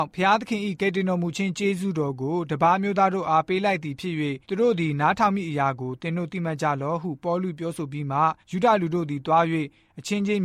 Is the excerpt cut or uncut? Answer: cut